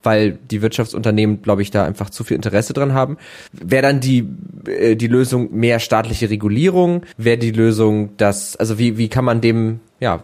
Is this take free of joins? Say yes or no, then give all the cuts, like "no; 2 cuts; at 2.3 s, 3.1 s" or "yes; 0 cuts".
no; 2 cuts; at 3.5 s, 7.1 s